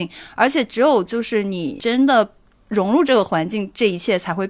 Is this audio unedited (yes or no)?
yes